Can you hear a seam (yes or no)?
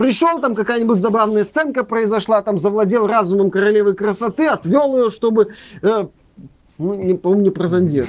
yes